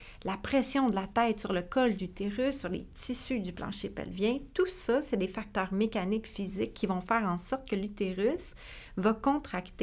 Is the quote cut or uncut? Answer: uncut